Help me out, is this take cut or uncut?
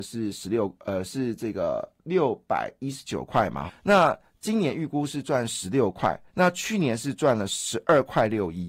cut